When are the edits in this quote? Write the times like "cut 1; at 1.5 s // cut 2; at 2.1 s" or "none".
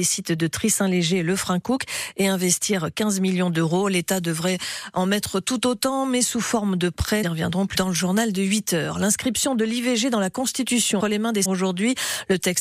cut 1; at 7.2 s // cut 2; at 7.8 s // cut 3; at 11.0 s // cut 4; at 11.5 s